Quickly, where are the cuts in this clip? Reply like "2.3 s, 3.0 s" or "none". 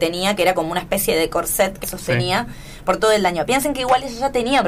1.8 s